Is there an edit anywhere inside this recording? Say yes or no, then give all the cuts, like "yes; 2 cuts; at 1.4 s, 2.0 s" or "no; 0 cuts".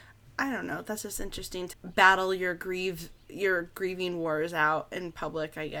yes; 1 cut; at 1.7 s